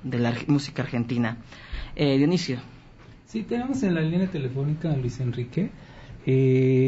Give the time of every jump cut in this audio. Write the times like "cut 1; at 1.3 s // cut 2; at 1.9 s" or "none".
none